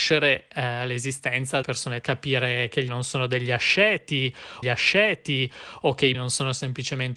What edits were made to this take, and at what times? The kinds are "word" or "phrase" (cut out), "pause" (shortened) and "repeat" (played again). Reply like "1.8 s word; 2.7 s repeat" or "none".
1.6 s word; 2.0 s word; 2.9 s word; 4.6 s repeat; 6.1 s word